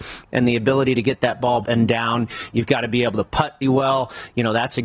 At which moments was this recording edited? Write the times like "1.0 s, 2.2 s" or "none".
1.6 s, 3.6 s